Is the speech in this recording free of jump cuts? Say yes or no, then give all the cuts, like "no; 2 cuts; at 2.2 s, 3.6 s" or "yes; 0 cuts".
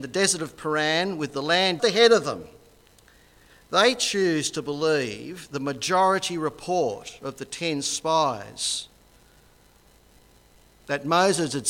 no; 1 cut; at 1.8 s